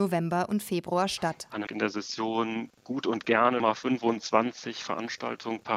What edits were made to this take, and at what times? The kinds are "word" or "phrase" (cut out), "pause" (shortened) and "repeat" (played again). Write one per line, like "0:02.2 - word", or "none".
0:01.7 - word
0:02.8 - pause
0:03.6 - word